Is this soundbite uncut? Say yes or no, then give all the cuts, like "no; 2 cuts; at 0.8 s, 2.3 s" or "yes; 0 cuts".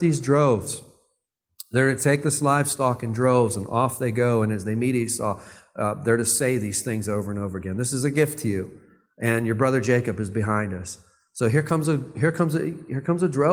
yes; 0 cuts